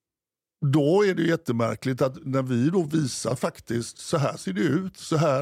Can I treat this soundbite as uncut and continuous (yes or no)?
yes